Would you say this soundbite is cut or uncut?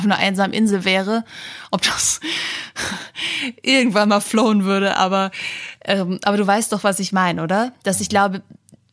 uncut